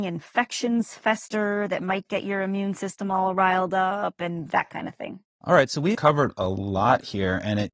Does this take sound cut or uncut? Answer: cut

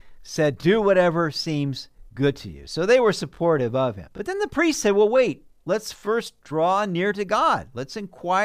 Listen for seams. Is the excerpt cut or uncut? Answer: cut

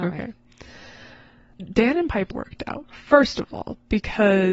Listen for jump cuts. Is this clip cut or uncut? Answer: cut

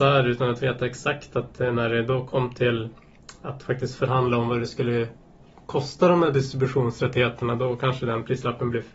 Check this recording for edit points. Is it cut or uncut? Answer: uncut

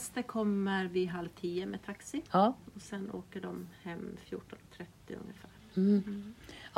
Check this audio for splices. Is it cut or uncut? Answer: cut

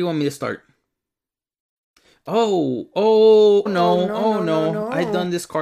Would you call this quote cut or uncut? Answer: cut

